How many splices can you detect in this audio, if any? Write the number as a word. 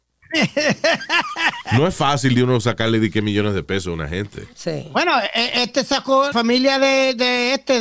one